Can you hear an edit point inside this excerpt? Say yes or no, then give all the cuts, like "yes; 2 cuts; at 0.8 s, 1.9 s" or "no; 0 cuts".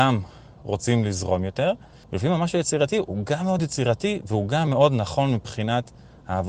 no; 0 cuts